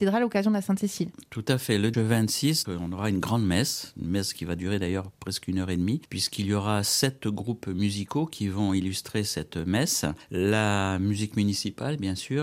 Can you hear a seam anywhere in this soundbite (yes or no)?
yes